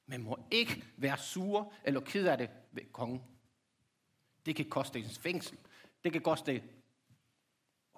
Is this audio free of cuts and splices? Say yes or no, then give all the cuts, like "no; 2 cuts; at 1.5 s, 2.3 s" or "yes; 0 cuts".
yes; 0 cuts